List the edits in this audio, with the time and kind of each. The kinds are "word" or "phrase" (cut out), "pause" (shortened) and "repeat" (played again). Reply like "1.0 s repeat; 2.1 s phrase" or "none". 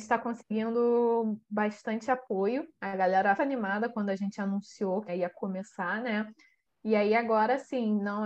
3.4 s phrase; 5.1 s phrase